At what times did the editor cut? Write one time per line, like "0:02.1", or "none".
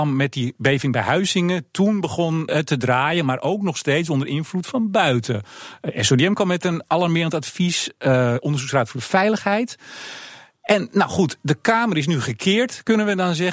0:02.5